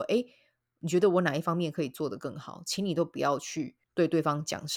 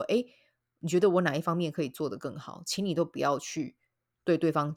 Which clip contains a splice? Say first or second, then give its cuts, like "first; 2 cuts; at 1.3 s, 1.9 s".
first; 1 cut; at 3.8 s